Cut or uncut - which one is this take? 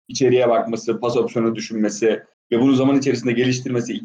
uncut